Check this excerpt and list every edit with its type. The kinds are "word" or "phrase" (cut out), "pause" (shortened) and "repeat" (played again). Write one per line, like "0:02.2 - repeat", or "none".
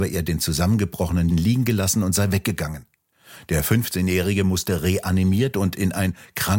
0:01.3 - word